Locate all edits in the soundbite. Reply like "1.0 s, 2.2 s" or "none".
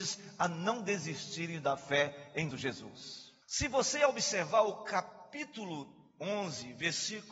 2.5 s, 3.4 s